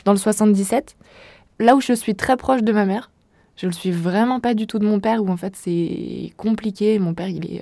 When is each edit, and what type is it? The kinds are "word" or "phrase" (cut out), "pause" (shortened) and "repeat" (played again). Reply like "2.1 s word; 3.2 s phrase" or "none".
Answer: none